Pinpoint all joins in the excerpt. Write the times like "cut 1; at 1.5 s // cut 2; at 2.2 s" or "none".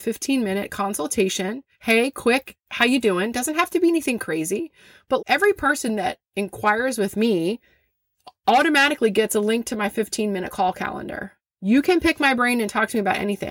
cut 1; at 5.2 s